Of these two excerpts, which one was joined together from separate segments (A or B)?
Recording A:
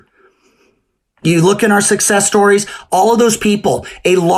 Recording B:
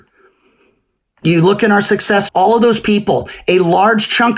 B